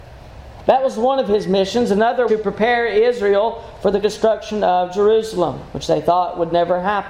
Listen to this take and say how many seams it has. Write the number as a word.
two